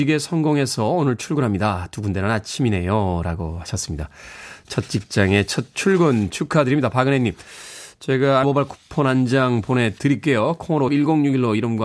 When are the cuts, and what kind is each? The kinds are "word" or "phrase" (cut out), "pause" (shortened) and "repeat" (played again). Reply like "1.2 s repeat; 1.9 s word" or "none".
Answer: 8.4 s word; 10.9 s word